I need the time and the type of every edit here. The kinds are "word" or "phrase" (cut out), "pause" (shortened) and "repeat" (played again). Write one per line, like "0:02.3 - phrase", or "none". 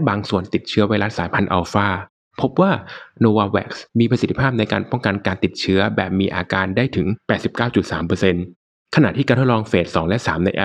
none